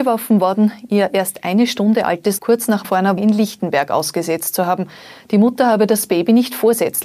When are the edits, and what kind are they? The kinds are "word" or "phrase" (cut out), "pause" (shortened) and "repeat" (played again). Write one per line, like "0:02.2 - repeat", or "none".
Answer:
0:02.4 - word
0:02.8 - word
0:03.2 - word